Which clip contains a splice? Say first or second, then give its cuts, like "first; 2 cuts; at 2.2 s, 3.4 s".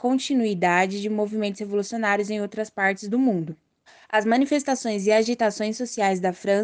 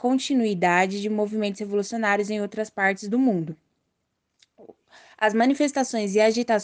first; 1 cut; at 3.9 s